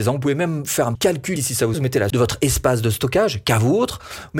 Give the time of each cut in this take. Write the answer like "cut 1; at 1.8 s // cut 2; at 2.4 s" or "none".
cut 1; at 0.9 s // cut 2; at 1.4 s // cut 3; at 1.7 s // cut 4; at 2.1 s